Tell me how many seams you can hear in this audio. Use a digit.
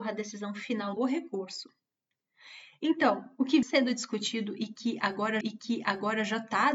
3